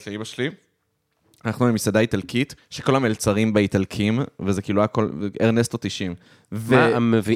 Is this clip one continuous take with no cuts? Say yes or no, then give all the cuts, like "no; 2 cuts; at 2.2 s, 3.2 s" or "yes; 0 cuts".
no; 2 cuts; at 2.6 s, 6.3 s